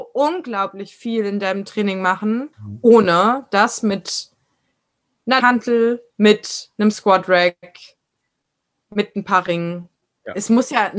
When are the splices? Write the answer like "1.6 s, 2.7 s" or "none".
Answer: 2.5 s, 5.4 s, 6.1 s

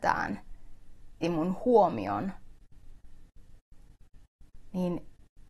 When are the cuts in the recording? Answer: 1.2 s

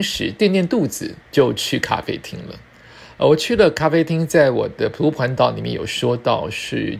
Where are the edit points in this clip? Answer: 1.2 s

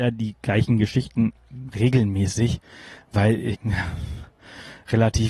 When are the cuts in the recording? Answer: 3.5 s

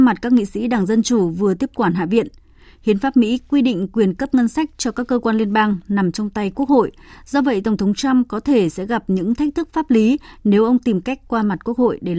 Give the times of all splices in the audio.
none

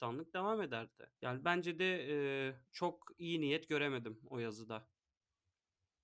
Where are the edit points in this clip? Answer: 1.2 s, 2.7 s

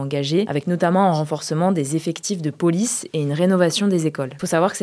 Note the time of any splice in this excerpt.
none

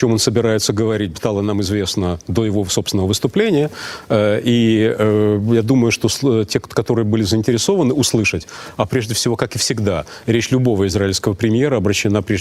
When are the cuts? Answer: none

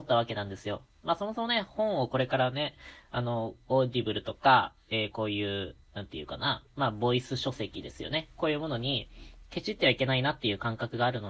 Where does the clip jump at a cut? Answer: 5.8 s, 6.7 s

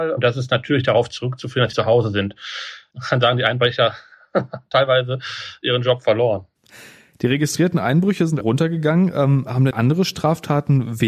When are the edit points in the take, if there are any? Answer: 1.7 s, 8.4 s, 9.7 s

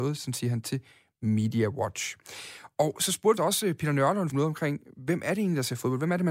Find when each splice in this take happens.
3.4 s, 4.3 s

